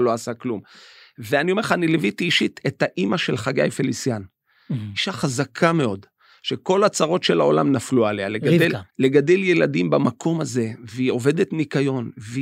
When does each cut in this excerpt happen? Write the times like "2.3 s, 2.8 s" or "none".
8.9 s